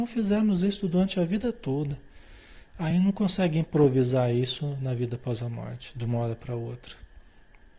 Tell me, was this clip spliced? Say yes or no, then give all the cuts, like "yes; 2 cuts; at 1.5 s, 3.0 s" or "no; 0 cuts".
no; 0 cuts